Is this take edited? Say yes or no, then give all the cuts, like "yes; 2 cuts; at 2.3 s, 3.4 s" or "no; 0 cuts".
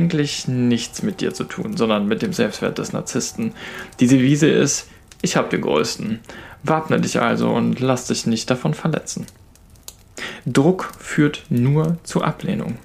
no; 0 cuts